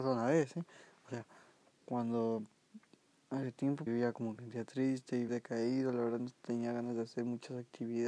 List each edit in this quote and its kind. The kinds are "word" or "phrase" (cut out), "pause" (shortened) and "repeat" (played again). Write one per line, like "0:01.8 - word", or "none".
0:03.9 - word
0:04.4 - word
0:05.3 - word
0:06.2 - word